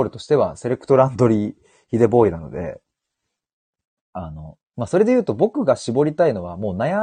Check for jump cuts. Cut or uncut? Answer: uncut